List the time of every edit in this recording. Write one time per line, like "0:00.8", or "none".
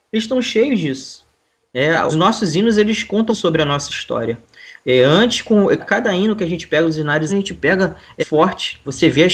0:02.1
0:03.3
0:05.8
0:07.3
0:08.2